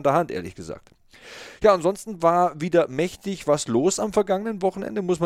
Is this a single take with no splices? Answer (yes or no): yes